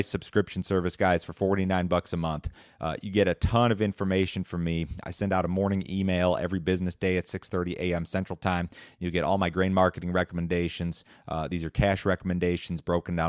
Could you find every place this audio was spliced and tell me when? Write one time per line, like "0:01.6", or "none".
none